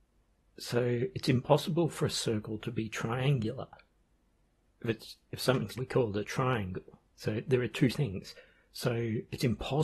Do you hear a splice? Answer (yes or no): yes